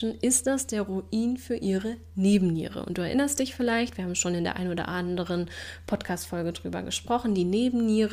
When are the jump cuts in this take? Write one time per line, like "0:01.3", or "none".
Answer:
none